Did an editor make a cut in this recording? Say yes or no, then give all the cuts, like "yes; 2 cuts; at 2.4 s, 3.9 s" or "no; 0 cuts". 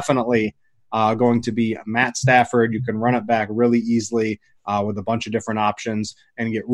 no; 0 cuts